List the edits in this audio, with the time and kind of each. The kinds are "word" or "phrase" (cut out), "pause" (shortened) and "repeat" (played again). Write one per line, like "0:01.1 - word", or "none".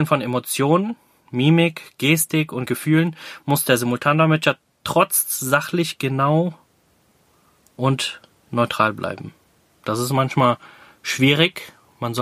none